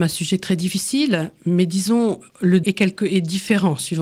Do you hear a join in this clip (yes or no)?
yes